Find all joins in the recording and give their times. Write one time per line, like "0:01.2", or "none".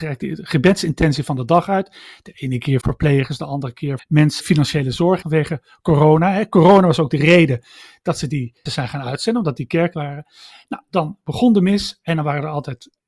0:02.8
0:04.0
0:04.4
0:05.2
0:08.7
0:09.9